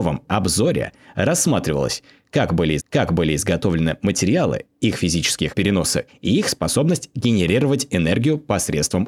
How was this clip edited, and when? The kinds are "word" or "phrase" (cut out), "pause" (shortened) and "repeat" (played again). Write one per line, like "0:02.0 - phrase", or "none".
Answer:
0:02.8 - repeat
0:05.5 - phrase
0:06.1 - word